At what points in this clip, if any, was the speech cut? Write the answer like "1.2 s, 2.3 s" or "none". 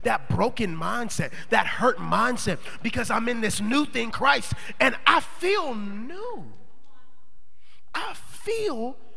4.1 s